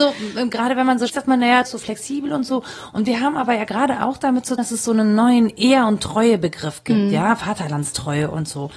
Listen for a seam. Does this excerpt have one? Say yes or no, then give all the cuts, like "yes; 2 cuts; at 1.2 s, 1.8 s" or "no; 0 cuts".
yes; 3 cuts; at 1.1 s, 1.7 s, 4.6 s